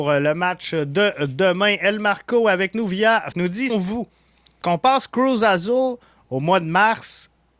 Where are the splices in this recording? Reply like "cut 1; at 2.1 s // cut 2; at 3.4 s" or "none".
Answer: cut 1; at 3.3 s // cut 2; at 3.7 s // cut 3; at 4.6 s